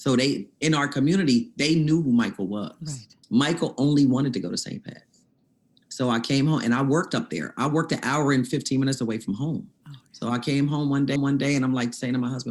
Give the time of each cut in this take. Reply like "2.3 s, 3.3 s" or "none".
3.2 s, 9.8 s, 11.2 s